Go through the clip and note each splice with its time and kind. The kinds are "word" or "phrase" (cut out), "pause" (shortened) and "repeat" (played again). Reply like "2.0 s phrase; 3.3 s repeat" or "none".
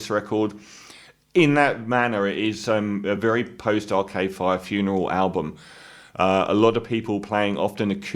none